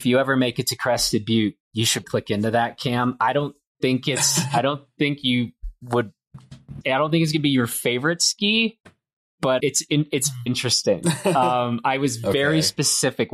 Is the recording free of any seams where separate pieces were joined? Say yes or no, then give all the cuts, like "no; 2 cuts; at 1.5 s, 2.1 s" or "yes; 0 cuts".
no; 4 cuts; at 2.0 s, 6.8 s, 9.6 s, 10.5 s